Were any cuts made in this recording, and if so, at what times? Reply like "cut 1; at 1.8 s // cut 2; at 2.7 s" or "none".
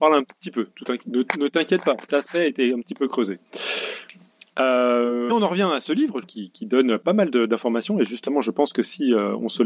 cut 1; at 2.1 s // cut 2; at 5.3 s // cut 3; at 6.2 s